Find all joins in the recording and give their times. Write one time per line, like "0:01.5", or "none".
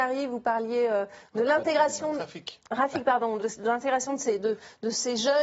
0:03.4